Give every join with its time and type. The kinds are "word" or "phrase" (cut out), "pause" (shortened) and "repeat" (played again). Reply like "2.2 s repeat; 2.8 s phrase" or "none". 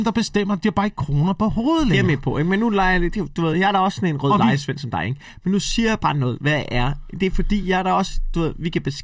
none

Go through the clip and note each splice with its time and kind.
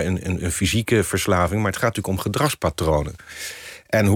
none

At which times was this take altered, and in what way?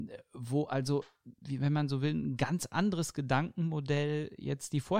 1.4 s word

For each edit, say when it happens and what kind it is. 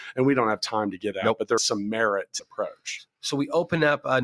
1.1 s word; 1.6 s word; 2.4 s word

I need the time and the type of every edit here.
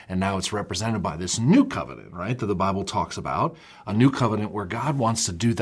none

